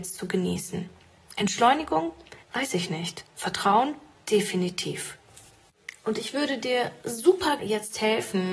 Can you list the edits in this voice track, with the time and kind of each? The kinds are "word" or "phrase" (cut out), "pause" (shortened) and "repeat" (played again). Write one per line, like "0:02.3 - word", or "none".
0:02.4 - pause
0:07.6 - word